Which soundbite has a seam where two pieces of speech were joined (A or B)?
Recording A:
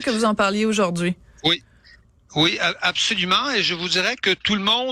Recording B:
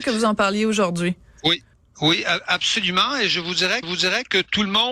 B